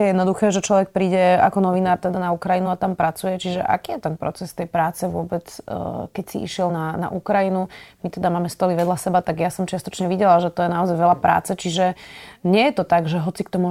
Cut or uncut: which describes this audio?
uncut